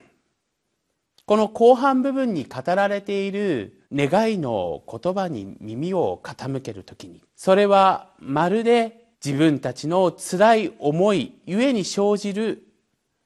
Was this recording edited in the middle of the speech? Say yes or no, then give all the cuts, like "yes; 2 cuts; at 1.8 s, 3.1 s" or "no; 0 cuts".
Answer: yes; 3 cuts; at 3.8 s, 7.3 s, 9.1 s